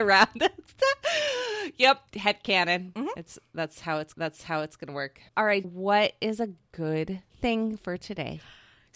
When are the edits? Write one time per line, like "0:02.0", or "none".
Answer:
0:02.1
0:04.1
0:05.3
0:05.6
0:07.3